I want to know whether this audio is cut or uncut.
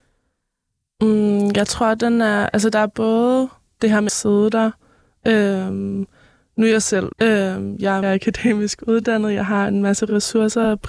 cut